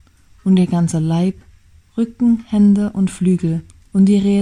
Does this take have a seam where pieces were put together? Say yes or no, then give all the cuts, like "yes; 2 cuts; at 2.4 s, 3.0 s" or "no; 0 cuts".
no; 0 cuts